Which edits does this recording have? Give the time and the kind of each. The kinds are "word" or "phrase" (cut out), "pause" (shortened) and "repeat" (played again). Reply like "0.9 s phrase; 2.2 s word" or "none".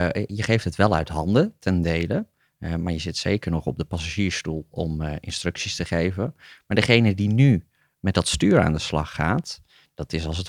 none